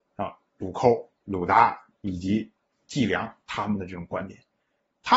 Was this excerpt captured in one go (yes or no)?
yes